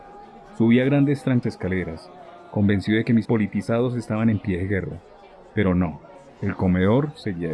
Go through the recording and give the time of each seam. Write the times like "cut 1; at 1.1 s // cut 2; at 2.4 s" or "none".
cut 1; at 1.4 s // cut 2; at 3.2 s